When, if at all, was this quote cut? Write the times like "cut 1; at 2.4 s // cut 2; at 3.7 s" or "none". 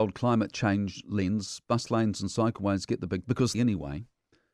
cut 1; at 3.2 s // cut 2; at 3.5 s